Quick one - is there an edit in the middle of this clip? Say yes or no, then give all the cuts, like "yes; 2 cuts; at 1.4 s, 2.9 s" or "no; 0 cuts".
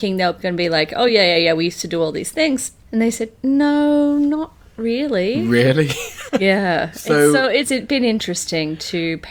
no; 0 cuts